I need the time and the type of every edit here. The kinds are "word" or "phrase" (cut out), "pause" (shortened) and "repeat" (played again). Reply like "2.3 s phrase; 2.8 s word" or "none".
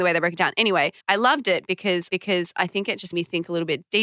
1.0 s pause; 2.1 s repeat; 3.1 s word